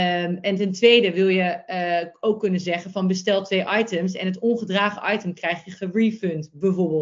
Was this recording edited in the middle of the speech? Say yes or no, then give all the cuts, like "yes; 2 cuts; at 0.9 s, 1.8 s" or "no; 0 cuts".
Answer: no; 0 cuts